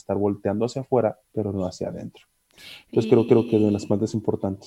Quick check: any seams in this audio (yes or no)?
yes